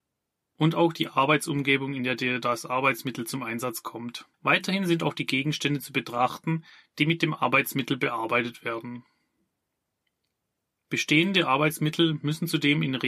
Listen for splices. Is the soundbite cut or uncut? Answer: cut